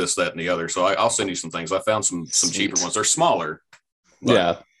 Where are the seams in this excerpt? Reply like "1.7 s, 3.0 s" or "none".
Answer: none